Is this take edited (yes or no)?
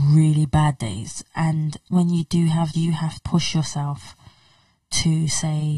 yes